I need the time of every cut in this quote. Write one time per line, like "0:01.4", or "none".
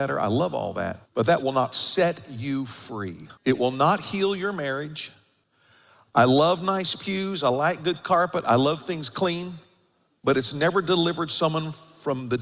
0:01.1
0:03.4
0:05.4